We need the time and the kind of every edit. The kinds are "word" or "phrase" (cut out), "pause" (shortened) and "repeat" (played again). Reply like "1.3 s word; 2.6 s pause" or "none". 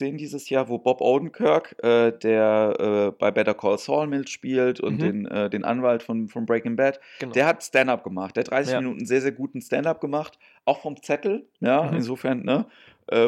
none